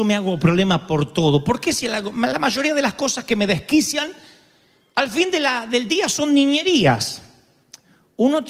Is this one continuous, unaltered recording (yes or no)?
yes